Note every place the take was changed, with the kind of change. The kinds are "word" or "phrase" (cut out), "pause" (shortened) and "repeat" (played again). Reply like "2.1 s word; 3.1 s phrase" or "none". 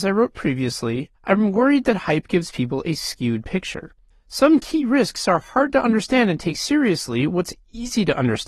1.1 s pause; 4.1 s pause

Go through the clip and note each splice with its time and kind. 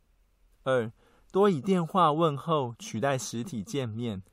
none

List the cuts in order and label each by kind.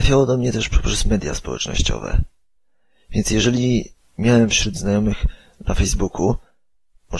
none

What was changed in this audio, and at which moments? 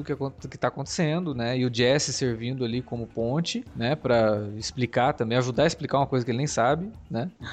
none

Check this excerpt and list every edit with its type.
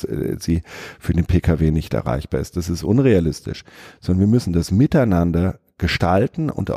none

